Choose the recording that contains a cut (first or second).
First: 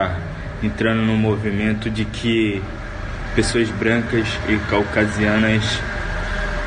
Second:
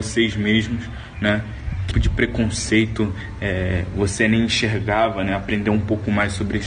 second